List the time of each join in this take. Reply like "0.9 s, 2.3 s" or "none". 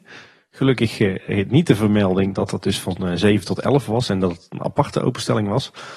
none